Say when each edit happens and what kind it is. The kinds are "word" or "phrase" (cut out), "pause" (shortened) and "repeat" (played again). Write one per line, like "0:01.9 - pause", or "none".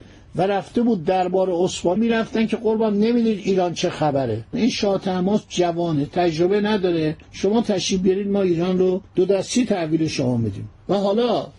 0:02.0 - word
0:07.2 - pause
0:09.1 - pause